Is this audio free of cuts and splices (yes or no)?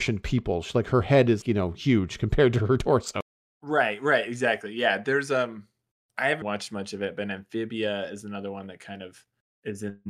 no